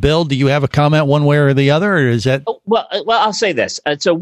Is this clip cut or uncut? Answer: uncut